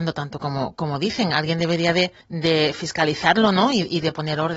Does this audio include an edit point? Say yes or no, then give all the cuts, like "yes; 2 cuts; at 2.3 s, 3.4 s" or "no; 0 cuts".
yes; 1 cut; at 2.2 s